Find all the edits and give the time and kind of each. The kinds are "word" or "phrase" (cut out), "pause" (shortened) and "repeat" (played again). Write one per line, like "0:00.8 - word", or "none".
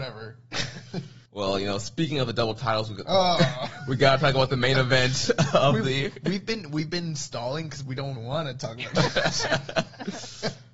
0:01.3 - pause
0:08.2 - word